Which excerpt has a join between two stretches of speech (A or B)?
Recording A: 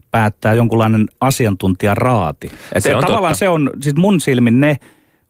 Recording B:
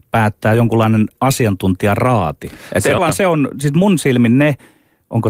B